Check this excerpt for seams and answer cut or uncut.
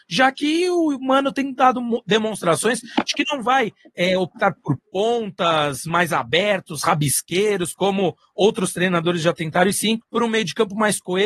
cut